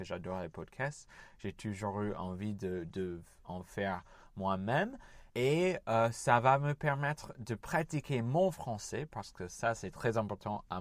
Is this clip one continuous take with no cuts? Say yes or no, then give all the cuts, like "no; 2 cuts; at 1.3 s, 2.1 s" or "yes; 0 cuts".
no; 1 cut; at 5.3 s